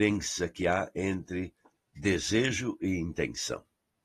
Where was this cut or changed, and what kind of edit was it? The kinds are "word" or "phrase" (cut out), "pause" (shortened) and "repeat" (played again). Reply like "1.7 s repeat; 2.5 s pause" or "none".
none